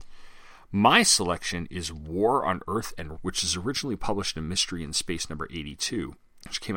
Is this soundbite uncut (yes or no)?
no